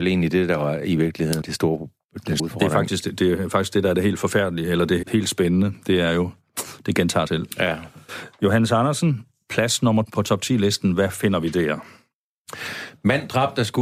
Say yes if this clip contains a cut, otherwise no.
yes